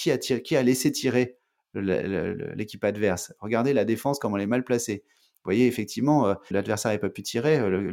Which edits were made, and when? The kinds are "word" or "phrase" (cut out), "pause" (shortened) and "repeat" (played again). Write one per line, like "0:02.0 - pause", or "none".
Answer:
0:06.5 - phrase